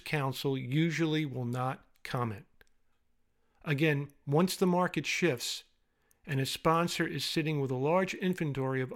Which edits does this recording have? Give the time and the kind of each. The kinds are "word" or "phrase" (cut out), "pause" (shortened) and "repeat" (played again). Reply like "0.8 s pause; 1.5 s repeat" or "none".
none